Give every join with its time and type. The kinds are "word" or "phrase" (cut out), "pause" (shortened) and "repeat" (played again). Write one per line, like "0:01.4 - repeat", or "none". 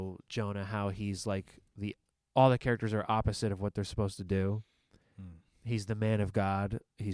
none